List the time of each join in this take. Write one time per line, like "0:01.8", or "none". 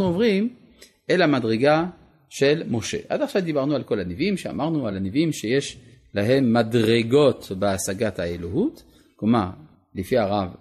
none

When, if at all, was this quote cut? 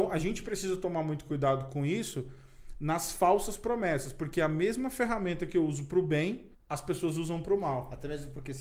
0:06.5

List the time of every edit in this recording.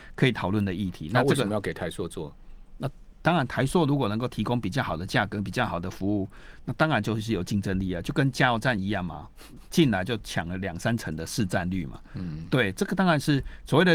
none

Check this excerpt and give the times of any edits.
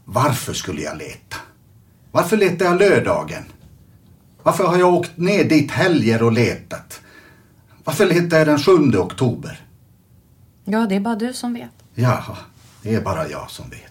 none

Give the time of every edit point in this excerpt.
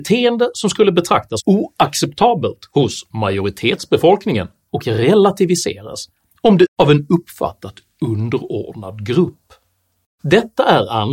0:01.4
0:04.7
0:06.7

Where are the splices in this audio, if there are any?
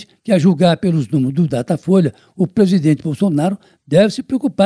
none

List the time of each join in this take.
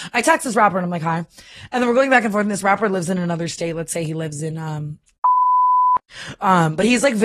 none

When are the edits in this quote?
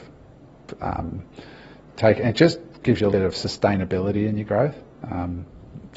0:03.1

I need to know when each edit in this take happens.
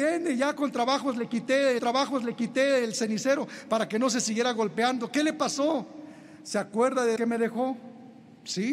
0:01.8
0:07.2

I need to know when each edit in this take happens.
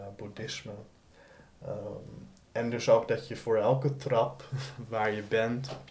none

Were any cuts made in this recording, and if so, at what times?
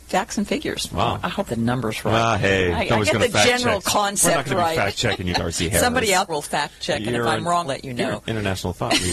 0:01.5
0:05.3
0:06.3
0:07.6

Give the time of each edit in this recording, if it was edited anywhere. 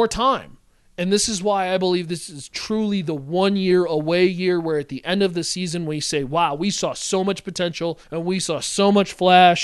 0:08.0

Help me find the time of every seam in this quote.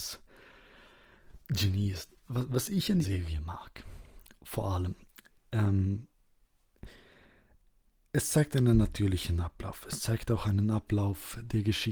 0:01.4
0:03.0

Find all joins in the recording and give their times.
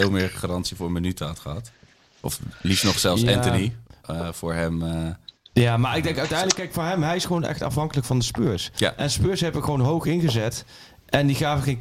none

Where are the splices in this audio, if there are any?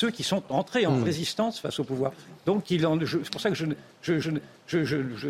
0:04.2

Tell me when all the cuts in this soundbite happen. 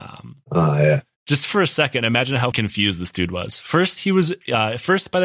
0:02.5

